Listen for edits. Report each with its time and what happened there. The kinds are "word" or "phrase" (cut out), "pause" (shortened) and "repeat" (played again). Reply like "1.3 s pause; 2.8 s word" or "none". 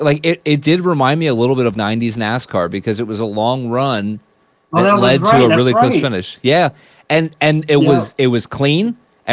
1.7 s word